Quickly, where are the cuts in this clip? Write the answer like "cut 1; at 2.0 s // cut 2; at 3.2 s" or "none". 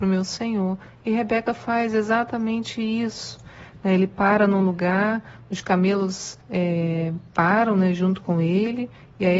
cut 1; at 6.4 s